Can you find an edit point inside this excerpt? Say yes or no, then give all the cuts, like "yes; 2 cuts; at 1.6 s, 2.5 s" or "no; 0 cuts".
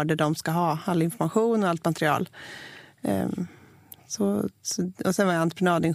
no; 0 cuts